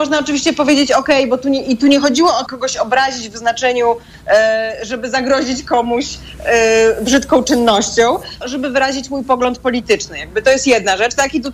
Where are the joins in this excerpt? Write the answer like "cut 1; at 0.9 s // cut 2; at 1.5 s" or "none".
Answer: cut 1; at 2.5 s // cut 2; at 8.4 s